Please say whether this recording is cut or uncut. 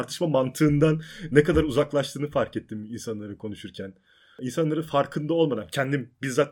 uncut